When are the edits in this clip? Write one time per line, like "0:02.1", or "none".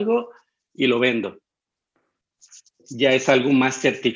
none

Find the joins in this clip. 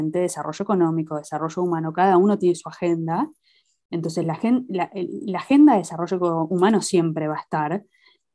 none

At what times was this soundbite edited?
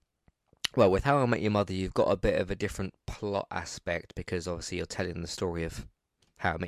none

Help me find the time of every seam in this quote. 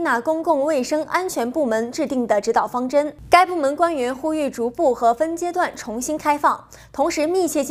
none

